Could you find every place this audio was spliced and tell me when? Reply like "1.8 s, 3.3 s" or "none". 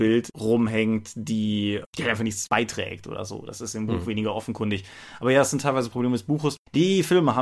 none